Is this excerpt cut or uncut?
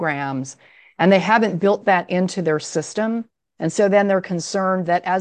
uncut